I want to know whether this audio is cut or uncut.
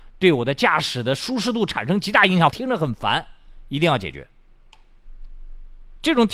cut